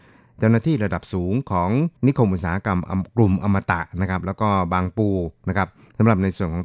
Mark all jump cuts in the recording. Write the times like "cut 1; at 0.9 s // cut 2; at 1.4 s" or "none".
cut 1; at 2.0 s